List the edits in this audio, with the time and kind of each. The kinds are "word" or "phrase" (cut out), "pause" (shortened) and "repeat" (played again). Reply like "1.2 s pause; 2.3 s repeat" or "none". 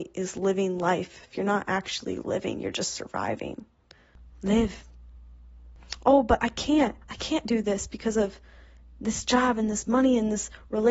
7.0 s pause